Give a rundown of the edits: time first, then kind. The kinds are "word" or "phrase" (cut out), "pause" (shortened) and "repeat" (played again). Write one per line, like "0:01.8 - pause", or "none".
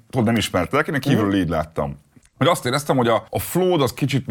0:02.2 - pause
0:03.3 - pause